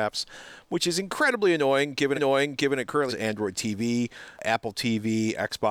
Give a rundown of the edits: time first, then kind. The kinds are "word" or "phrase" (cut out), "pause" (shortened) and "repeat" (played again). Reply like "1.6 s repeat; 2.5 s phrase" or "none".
2.2 s repeat; 3.1 s word